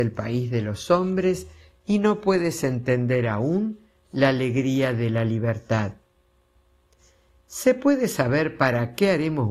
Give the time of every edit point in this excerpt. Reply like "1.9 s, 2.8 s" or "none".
none